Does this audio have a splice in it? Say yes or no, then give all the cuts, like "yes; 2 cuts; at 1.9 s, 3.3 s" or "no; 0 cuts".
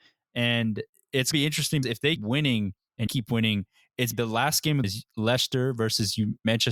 yes; 6 cuts; at 1.3 s, 1.8 s, 2.2 s, 3.1 s, 4.1 s, 4.8 s